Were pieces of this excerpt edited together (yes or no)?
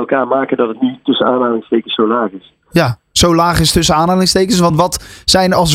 no